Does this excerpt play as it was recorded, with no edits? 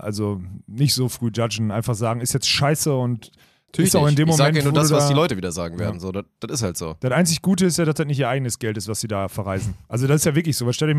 yes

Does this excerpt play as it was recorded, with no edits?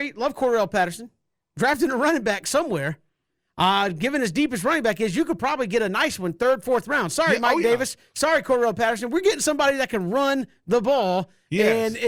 yes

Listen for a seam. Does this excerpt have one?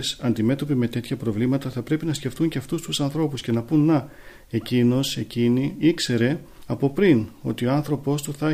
no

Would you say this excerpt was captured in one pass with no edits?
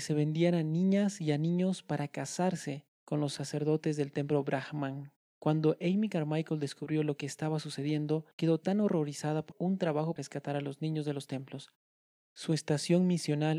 no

